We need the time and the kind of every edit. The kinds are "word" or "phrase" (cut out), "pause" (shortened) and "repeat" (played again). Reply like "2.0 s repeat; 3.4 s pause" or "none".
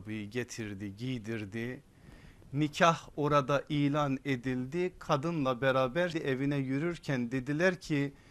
6.1 s word